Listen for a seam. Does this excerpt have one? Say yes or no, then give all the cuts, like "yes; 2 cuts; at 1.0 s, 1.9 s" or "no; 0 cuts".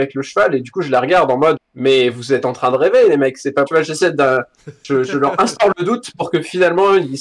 yes; 2 cuts; at 1.6 s, 3.7 s